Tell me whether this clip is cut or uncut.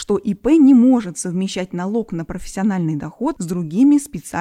uncut